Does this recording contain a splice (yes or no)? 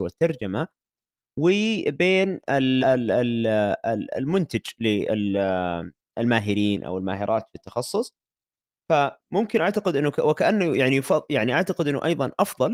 yes